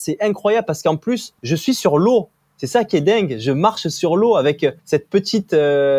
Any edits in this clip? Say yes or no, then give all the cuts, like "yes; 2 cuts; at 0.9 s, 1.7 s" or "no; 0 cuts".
yes; 2 cuts; at 1.4 s, 4.8 s